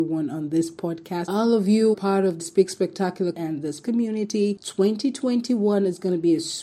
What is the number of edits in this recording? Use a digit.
5